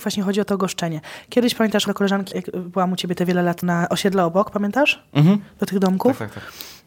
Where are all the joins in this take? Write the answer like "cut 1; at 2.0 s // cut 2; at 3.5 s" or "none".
cut 1; at 1.9 s // cut 2; at 2.3 s // cut 3; at 3.6 s